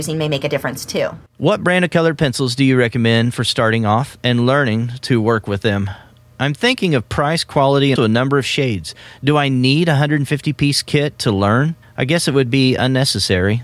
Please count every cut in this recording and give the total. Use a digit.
3